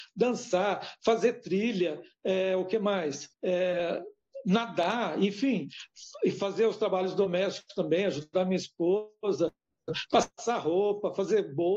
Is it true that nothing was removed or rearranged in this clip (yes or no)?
no